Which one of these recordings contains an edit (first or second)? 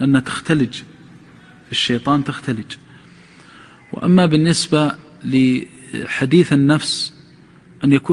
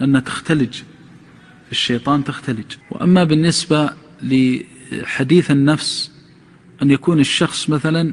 second